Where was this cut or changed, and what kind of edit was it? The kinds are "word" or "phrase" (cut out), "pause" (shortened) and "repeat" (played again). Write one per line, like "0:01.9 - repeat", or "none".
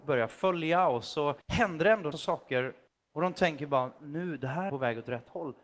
0:01.4 - pause
0:02.1 - word
0:02.9 - pause
0:04.7 - phrase